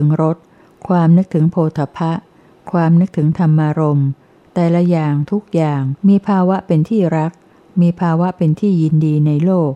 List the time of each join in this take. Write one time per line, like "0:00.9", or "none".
0:06.0